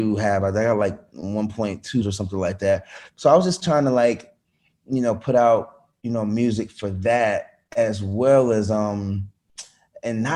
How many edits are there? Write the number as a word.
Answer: one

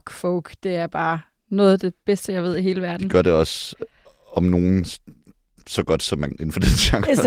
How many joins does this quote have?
one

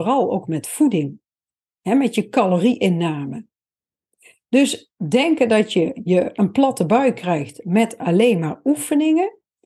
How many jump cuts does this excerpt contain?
zero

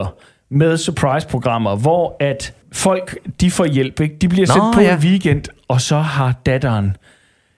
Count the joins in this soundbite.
one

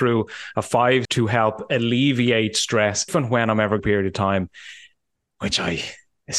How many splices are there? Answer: three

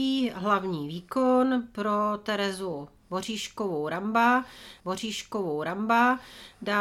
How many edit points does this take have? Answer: one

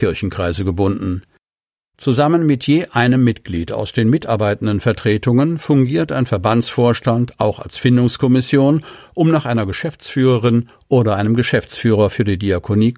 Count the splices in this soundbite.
zero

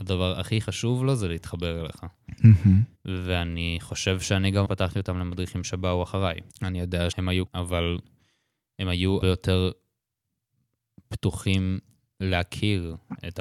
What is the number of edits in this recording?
six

